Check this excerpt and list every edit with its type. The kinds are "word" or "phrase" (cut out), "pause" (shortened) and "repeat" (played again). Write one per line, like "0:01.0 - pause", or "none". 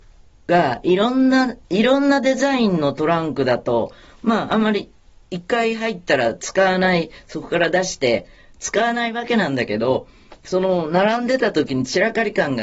0:01.6 - pause